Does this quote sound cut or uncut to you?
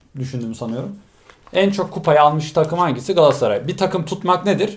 uncut